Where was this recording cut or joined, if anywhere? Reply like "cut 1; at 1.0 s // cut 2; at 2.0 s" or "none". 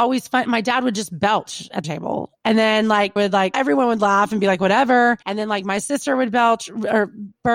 cut 1; at 1.8 s // cut 2; at 3.2 s // cut 3; at 3.5 s // cut 4; at 5.2 s

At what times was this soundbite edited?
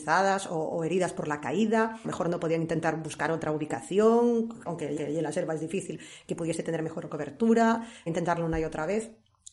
cut 1; at 2.0 s // cut 2; at 4.7 s // cut 3; at 5.0 s // cut 4; at 8.1 s

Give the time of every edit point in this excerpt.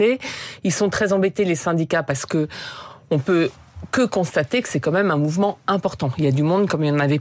none

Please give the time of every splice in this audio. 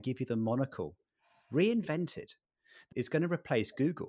cut 1; at 2.9 s

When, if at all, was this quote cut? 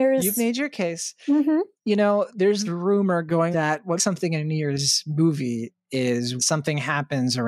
cut 1; at 1.7 s // cut 2; at 2.6 s // cut 3; at 3.5 s // cut 4; at 4.0 s // cut 5; at 6.4 s

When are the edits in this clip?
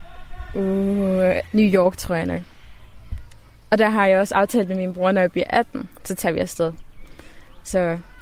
none

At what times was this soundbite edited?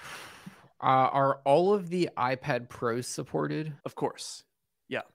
cut 1; at 3.8 s

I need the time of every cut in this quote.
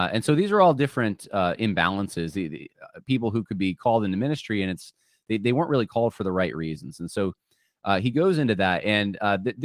none

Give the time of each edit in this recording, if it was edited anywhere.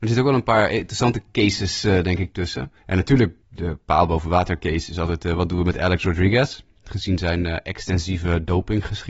cut 1; at 2.8 s // cut 2; at 3.4 s

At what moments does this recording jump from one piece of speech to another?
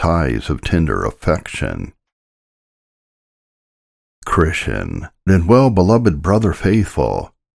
cut 1; at 5.3 s

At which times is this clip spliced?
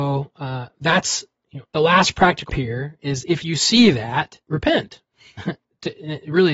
cut 1; at 1.7 s // cut 2; at 2.5 s // cut 3; at 4.4 s

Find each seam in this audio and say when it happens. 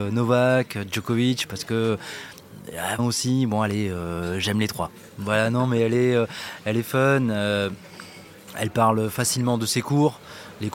cut 1; at 3.0 s

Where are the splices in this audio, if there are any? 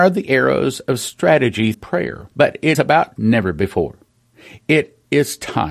cut 1; at 1.7 s // cut 2; at 2.3 s // cut 3; at 2.7 s // cut 4; at 3.2 s

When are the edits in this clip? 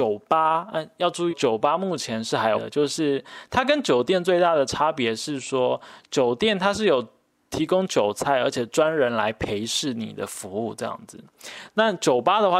cut 1; at 1.3 s // cut 2; at 2.5 s

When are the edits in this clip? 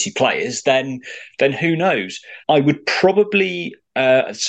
cut 1; at 2.4 s

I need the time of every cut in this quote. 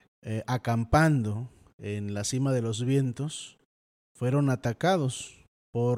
none

